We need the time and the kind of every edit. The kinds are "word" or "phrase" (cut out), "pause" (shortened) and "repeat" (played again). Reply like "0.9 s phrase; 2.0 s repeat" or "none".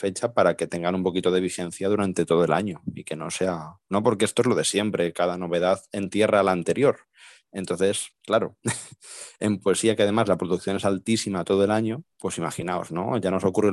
12.1 s pause

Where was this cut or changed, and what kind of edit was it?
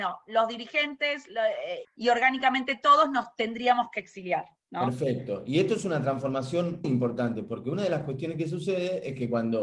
1.8 s word; 6.8 s word

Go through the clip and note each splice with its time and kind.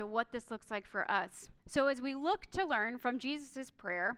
1.6 s pause

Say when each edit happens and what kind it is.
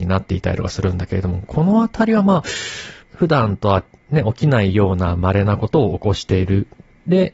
3.0 s pause

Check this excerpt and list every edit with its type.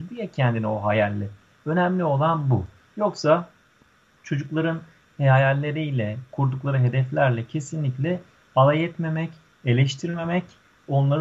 none

